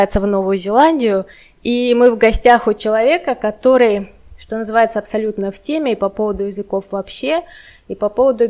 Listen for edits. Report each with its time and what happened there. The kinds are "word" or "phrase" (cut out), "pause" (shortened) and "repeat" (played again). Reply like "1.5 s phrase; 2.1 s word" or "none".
none